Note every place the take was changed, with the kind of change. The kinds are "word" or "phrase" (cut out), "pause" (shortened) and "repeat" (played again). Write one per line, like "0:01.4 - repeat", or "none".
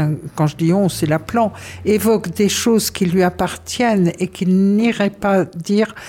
none